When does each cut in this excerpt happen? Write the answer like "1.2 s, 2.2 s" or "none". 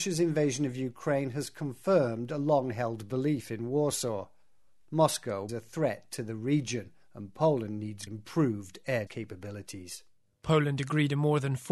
5.5 s, 8.1 s, 9.1 s